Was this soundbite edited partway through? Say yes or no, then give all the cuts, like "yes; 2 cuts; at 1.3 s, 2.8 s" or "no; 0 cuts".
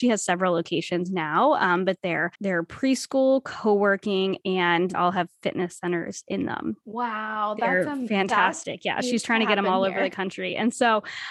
yes; 2 cuts; at 2.3 s, 4.9 s